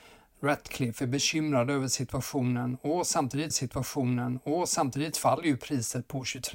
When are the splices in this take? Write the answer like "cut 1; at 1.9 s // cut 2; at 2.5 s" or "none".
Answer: cut 1; at 3.5 s